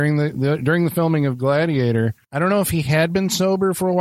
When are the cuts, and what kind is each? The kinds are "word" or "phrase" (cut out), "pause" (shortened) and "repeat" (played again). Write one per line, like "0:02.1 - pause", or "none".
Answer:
0:02.2 - pause